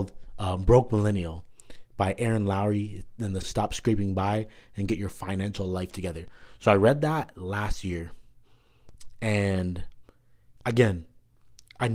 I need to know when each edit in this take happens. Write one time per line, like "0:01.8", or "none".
0:03.4